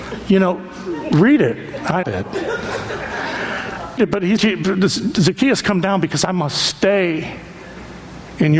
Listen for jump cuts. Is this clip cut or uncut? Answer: cut